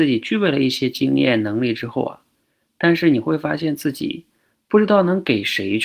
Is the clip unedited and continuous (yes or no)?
yes